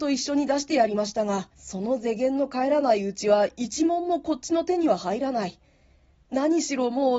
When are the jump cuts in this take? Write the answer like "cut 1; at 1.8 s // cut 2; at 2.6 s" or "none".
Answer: cut 1; at 1.5 s